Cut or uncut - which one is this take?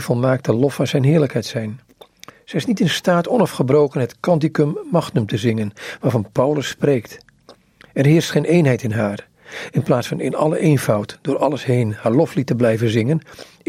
uncut